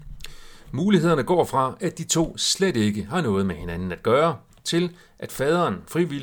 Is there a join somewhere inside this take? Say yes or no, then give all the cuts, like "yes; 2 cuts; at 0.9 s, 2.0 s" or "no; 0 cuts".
no; 0 cuts